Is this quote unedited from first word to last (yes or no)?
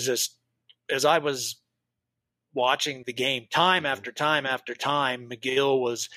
no